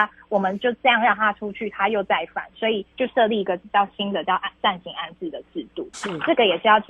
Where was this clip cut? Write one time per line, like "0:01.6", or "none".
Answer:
0:02.9
0:05.9